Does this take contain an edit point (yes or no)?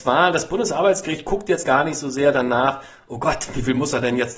no